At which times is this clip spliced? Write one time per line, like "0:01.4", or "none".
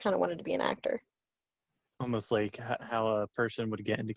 none